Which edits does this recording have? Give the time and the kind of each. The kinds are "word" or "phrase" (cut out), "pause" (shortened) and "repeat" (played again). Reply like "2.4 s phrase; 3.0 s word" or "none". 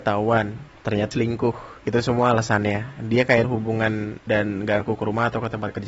1.1 s word; 1.8 s pause; 3.4 s word; 4.3 s phrase; 4.8 s word